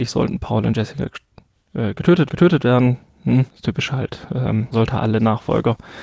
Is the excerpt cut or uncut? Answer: cut